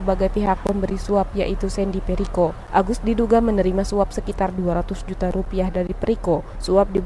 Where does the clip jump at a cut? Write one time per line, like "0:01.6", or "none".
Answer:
none